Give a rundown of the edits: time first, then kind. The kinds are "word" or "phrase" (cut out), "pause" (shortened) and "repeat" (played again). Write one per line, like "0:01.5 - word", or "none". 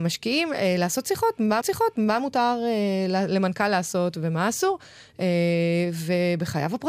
0:01.6 - repeat

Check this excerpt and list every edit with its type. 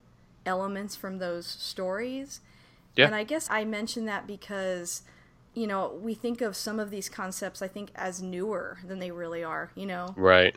0:03.5 - word

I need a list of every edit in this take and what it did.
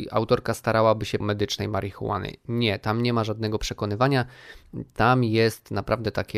0:01.2 - phrase

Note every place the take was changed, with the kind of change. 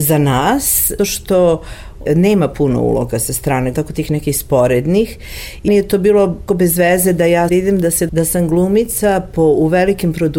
0:01.0 - word
0:03.7 - word
0:05.7 - word
0:06.5 - word
0:07.5 - word
0:08.1 - word

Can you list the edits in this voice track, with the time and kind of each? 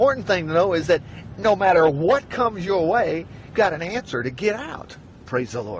0:03.5 - word

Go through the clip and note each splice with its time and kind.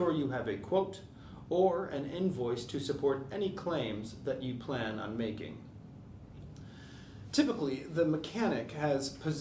none

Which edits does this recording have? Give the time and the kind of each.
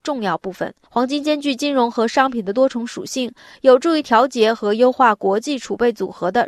none

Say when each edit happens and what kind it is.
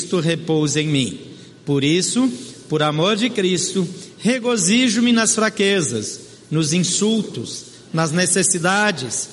none

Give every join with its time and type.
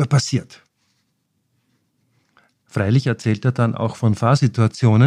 none

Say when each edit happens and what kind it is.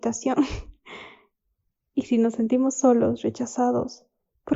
none

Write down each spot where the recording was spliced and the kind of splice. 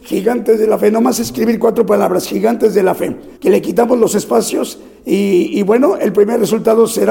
0:03.4 - pause

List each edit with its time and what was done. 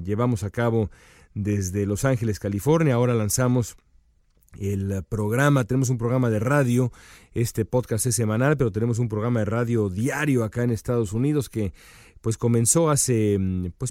none

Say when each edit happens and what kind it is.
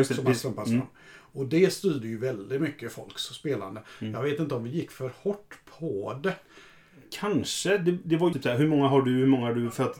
0:08.3 - phrase

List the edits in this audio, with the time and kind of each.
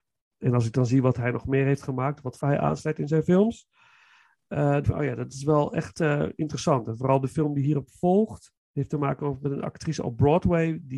0:02.4 - word
0:04.8 - word
0:08.6 - pause

